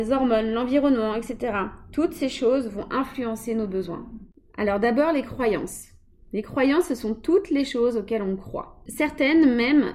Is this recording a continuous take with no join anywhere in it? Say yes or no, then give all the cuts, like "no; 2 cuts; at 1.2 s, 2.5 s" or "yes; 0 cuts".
yes; 0 cuts